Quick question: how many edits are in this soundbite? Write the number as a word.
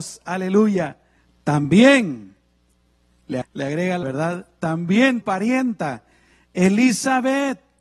four